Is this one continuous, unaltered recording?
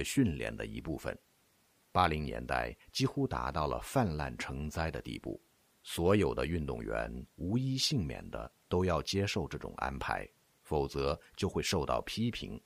yes; 0 cuts

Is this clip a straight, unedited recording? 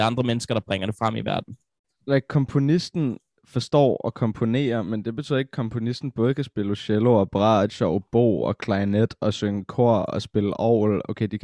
yes; 0 cuts

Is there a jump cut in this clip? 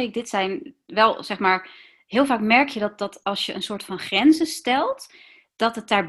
no; 0 cuts

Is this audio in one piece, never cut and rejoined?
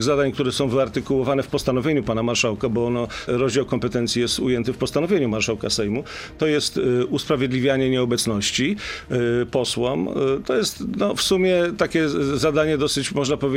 no; 1 cut; at 3.3 s

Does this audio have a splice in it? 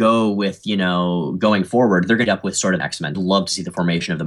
yes; 3 cuts; at 2.3 s, 2.8 s, 3.1 s

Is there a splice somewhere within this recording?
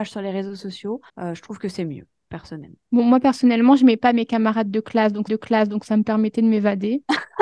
yes; 3 cuts; at 1.1 s, 2.8 s, 5.3 s

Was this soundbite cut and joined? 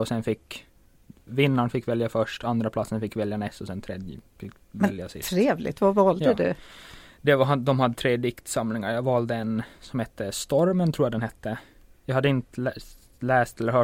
no; 0 cuts

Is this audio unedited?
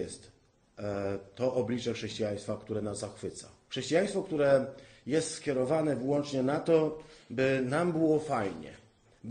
no; 1 cut; at 3.6 s

